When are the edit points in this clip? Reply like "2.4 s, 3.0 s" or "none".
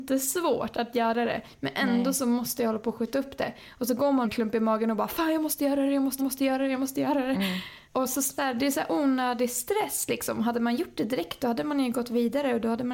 4.2 s, 6.2 s, 7.9 s, 8.4 s